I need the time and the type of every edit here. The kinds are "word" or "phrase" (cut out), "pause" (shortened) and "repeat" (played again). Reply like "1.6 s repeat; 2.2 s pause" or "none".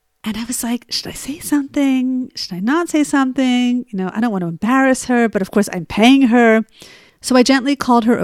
none